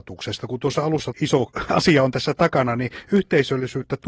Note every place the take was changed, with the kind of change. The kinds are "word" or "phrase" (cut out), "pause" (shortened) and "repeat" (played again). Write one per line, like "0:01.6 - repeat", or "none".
0:01.1 - phrase